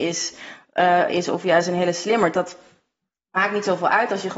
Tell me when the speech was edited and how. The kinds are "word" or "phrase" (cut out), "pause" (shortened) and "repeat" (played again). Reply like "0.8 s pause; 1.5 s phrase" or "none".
none